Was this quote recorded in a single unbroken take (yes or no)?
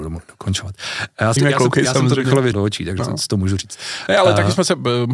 no